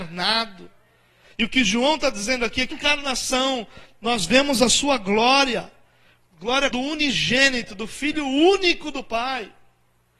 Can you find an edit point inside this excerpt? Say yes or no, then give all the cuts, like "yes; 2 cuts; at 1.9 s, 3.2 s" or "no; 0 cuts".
yes; 2 cuts; at 2.7 s, 6.7 s